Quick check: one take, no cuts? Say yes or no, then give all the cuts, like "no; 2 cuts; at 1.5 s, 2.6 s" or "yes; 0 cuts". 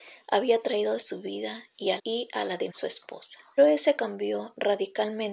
no; 5 cuts; at 1.0 s, 2.0 s, 2.7 s, 3.6 s, 4.0 s